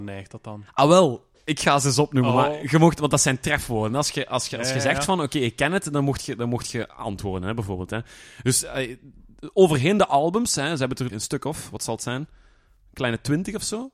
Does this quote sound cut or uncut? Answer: cut